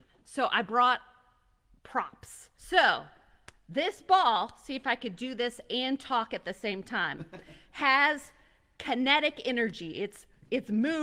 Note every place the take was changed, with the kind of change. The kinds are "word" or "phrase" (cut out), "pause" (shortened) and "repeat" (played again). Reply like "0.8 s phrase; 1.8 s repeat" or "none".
2.6 s pause